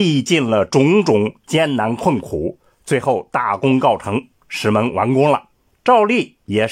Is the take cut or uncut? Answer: cut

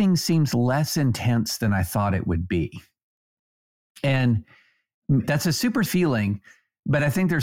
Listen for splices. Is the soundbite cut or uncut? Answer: cut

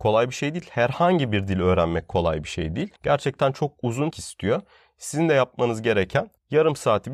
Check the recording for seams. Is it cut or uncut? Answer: cut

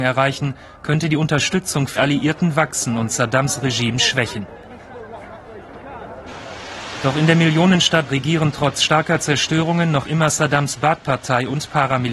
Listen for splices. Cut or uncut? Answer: cut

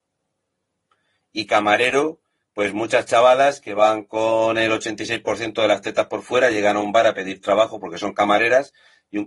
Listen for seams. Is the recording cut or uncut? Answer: uncut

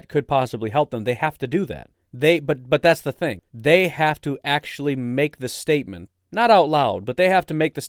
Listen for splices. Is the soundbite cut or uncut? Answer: cut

